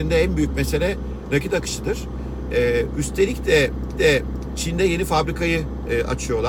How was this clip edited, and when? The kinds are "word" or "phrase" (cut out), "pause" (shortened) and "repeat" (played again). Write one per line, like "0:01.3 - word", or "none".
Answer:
0:04.0 - repeat